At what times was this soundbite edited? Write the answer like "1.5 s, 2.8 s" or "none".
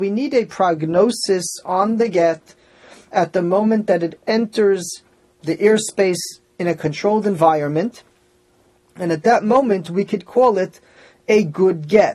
none